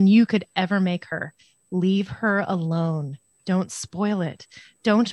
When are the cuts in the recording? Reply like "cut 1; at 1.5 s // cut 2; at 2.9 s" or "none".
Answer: none